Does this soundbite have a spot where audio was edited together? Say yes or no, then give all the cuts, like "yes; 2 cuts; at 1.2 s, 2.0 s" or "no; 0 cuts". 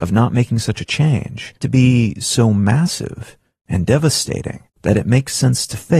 yes; 2 cuts; at 1.6 s, 4.7 s